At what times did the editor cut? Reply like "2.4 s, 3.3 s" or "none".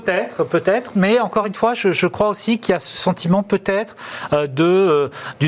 none

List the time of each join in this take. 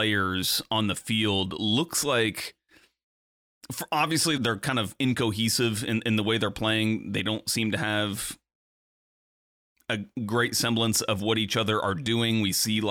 4.4 s

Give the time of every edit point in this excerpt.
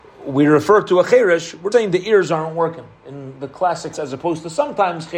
1.7 s, 3.9 s

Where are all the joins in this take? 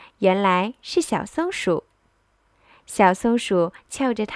none

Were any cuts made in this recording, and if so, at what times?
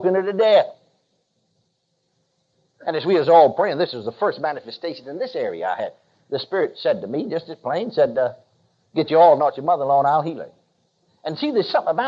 none

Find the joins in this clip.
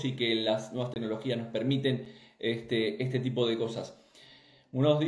none

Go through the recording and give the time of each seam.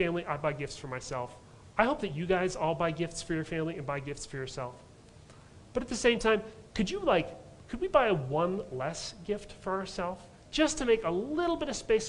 6.7 s

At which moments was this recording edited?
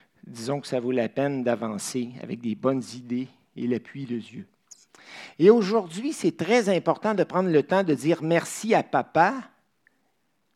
none

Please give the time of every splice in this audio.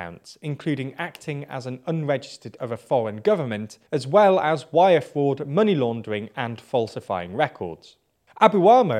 2.6 s, 3.9 s

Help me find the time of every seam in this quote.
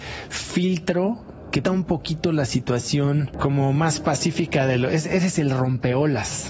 1.6 s

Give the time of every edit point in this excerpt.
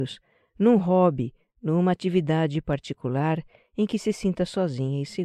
none

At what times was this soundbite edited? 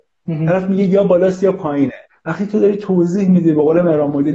2.1 s

